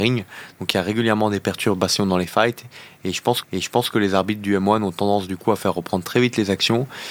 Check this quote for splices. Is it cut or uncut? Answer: cut